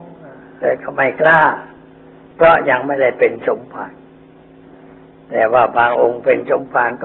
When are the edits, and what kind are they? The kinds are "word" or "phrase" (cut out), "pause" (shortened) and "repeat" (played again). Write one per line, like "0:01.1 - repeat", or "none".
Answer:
none

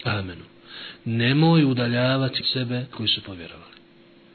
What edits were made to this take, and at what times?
0:02.4 - word
0:02.9 - word

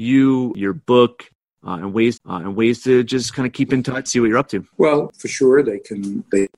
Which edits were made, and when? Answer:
0:02.2 - repeat
0:04.1 - word
0:04.7 - pause

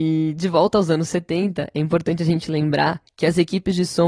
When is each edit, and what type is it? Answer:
none

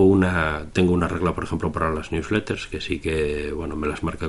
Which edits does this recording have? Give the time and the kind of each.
none

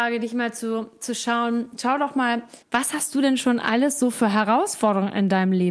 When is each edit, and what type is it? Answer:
0:02.6 - pause

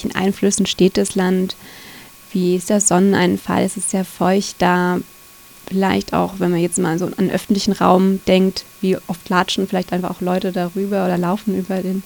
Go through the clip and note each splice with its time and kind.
none

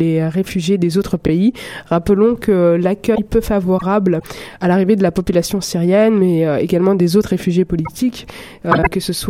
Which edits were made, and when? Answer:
none

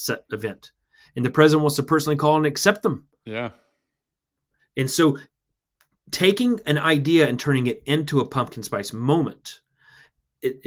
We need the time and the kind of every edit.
none

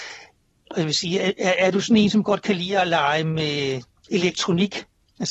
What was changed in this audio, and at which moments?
none

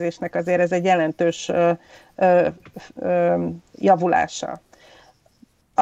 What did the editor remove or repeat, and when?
none

